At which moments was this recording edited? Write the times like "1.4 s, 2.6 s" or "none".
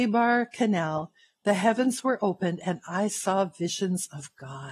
none

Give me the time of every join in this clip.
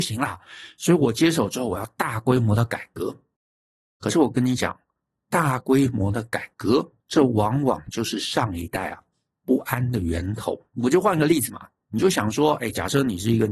7.0 s, 10.7 s

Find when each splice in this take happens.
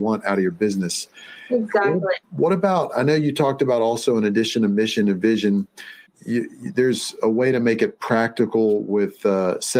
2.2 s, 6.1 s

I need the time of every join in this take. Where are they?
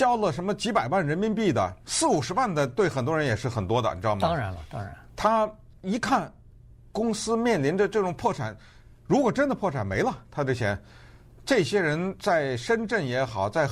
1.8 s

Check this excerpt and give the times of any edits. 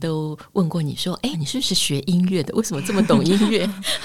1.3 s

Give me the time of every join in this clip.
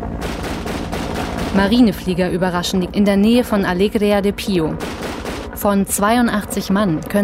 2.9 s

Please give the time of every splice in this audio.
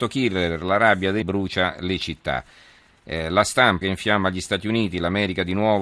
1.2 s, 3.8 s

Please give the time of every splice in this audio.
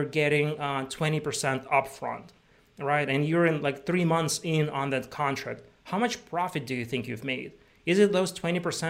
none

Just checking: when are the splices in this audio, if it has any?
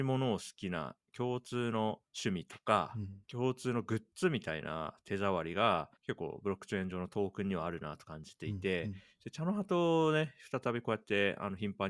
2.1 s, 3.2 s, 6.0 s

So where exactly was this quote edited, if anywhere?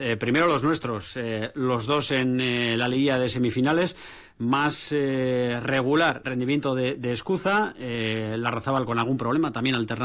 6.2 s

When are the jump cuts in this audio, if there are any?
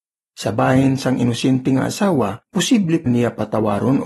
2.4 s, 3.1 s

